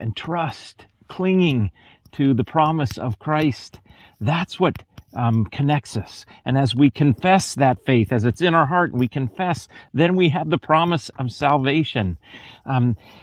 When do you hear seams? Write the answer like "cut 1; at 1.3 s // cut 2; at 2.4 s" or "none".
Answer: none